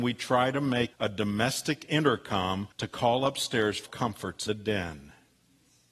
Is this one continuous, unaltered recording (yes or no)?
no